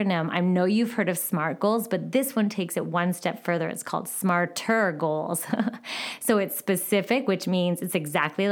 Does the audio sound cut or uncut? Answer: uncut